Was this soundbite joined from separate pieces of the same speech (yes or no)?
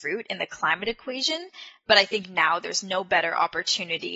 no